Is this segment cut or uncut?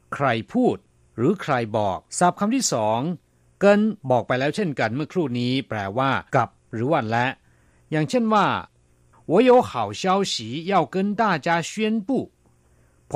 cut